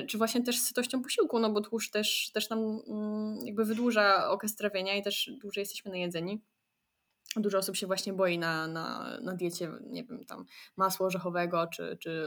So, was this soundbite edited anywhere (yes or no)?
no